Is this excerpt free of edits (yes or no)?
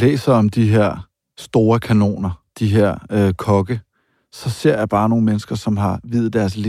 yes